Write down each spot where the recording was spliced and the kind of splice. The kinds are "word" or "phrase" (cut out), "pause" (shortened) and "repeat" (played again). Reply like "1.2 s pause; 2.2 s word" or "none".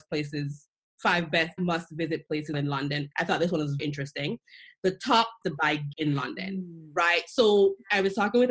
1.6 s word; 2.5 s word; 3.1 s word; 3.8 s word; 5.4 s word; 5.9 s word